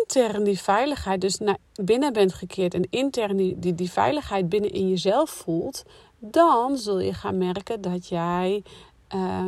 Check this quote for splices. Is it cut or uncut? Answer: uncut